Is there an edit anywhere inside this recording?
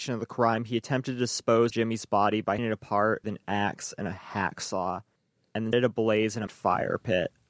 yes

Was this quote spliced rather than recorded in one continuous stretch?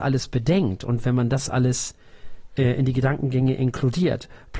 no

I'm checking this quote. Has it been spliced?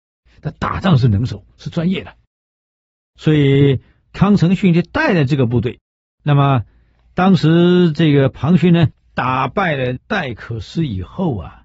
no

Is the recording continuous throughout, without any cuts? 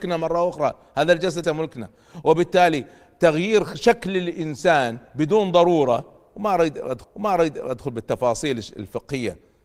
no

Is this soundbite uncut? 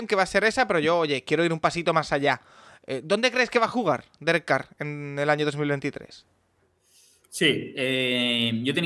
yes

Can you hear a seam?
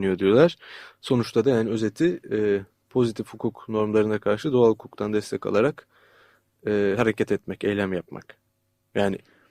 no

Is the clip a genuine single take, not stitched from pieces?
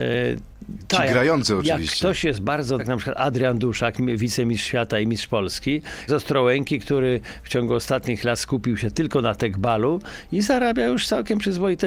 no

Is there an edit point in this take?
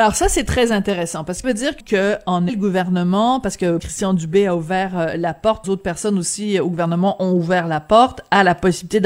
yes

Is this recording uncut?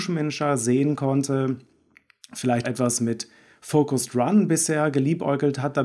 no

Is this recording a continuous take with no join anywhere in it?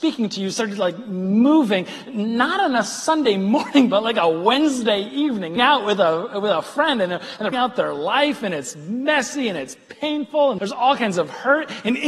no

